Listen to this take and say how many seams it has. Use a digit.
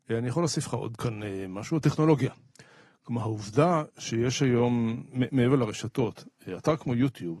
0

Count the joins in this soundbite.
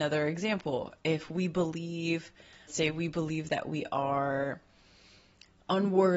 1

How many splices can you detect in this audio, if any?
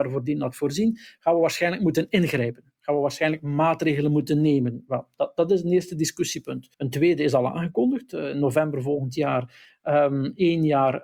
1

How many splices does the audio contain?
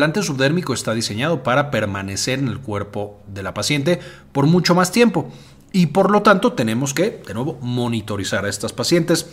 0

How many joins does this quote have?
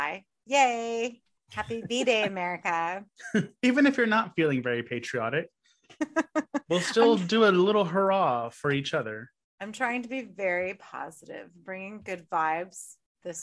0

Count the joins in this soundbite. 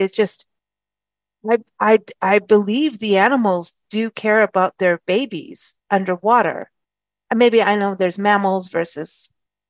1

